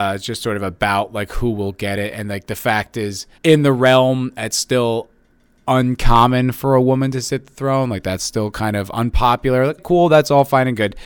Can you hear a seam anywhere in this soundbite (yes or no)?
yes